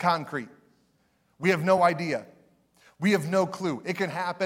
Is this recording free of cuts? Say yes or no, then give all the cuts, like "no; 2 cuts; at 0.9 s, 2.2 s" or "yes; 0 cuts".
yes; 0 cuts